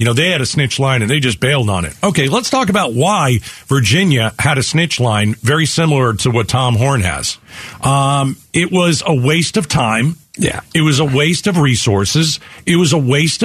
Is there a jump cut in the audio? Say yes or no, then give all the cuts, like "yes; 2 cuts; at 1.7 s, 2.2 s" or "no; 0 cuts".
no; 0 cuts